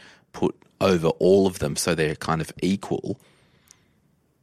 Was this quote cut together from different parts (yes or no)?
no